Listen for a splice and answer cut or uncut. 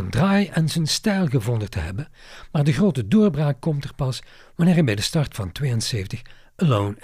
uncut